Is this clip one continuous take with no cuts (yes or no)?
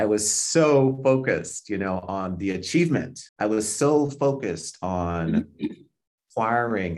no